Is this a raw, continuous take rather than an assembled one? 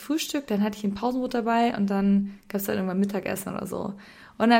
yes; 0 cuts

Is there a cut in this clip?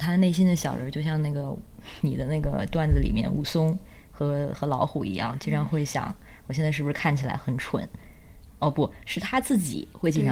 no; 0 cuts

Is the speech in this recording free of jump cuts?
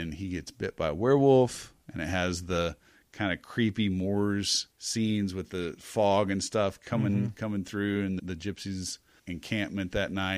no; 3 cuts; at 4.7 s, 8.2 s, 9.2 s

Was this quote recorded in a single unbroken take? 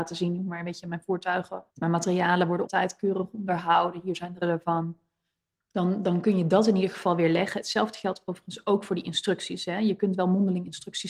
no; 3 cuts; at 1.7 s, 2.7 s, 4.4 s

